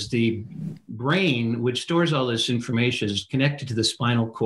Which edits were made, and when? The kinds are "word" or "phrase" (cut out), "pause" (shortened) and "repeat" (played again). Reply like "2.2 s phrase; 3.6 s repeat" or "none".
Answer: none